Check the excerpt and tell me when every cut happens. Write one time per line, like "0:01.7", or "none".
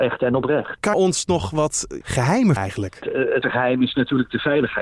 0:00.9
0:02.0
0:02.6
0:03.4

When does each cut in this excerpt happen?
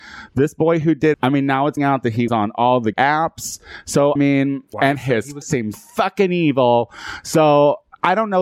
0:01.1
0:01.8
0:02.3
0:02.9
0:04.2
0:04.7
0:05.4
0:05.7

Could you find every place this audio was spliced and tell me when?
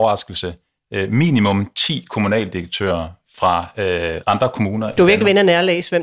0:04.2

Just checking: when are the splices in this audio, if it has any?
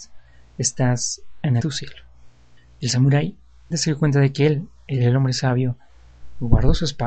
0:01.6
0:02.6
0:03.7

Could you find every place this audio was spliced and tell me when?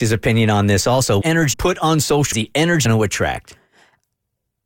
0:01.2
0:01.5
0:02.3
0:02.9

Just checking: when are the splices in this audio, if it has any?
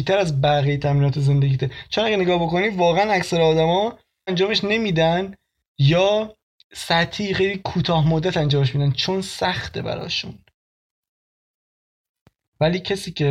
0:04.3
0:06.6

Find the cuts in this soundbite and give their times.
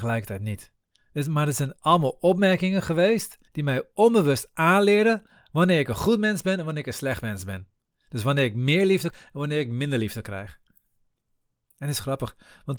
0:03.5
0:09.1

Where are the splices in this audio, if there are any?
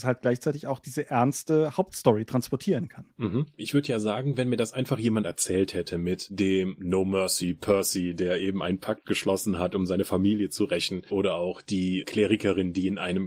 none

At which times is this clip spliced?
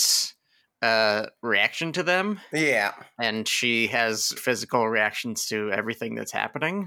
0:04.4

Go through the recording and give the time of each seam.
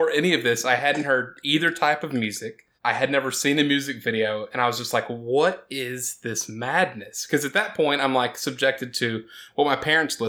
0:02.8

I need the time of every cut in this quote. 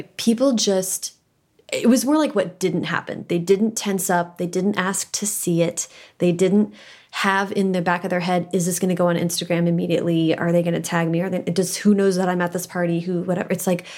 none

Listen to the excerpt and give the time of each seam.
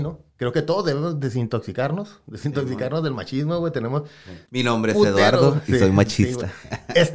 0:04.5

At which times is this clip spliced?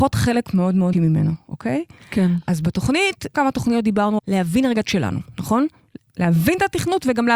0:00.9
0:03.3
0:04.2
0:04.8

